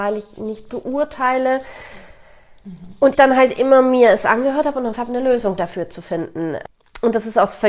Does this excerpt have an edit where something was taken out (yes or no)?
yes